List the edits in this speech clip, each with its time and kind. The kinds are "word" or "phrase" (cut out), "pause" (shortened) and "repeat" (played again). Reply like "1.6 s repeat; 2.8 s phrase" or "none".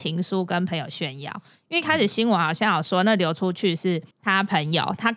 4.1 s pause